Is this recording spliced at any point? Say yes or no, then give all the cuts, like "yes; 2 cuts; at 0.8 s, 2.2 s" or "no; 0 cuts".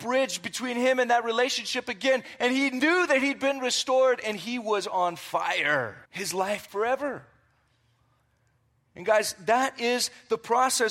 yes; 2 cuts; at 6.1 s, 6.7 s